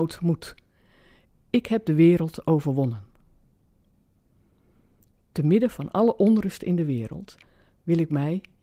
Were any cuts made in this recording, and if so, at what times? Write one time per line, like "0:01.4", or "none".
none